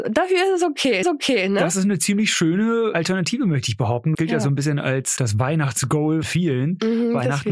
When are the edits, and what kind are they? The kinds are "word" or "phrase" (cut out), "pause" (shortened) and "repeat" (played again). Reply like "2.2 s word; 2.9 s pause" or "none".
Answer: 1.0 s repeat; 4.1 s word; 6.2 s word